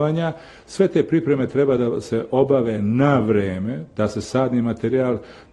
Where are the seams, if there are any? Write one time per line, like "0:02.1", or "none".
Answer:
none